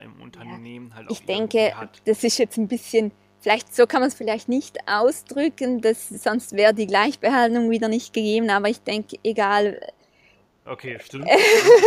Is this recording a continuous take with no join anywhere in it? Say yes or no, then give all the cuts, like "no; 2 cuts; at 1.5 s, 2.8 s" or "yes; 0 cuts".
yes; 0 cuts